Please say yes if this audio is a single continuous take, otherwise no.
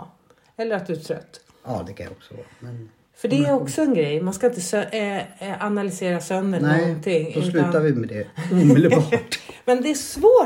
yes